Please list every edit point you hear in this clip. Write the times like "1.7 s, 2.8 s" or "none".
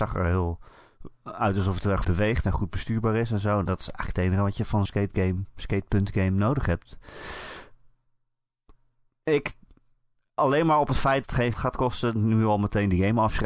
2.0 s, 4.9 s, 11.2 s, 11.5 s